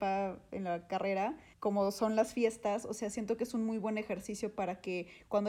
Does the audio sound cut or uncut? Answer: cut